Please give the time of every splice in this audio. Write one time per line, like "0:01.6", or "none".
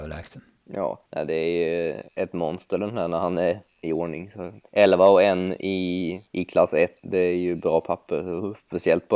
0:01.1
0:02.1
0:03.7
0:04.7
0:06.3
0:07.0